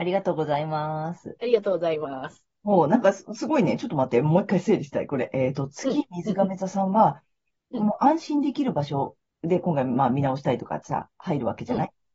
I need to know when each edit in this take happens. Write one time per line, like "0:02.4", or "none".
0:09.3